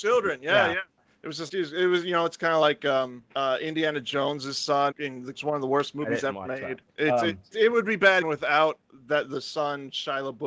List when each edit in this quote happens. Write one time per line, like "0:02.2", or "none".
0:01.5
0:03.3
0:04.9
0:05.3
0:06.9
0:07.5
0:08.2